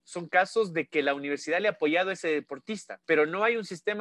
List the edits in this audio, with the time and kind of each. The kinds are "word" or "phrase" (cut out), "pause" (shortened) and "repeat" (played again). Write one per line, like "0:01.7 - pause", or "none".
0:03.0 - pause